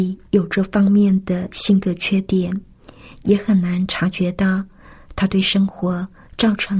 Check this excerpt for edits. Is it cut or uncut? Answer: uncut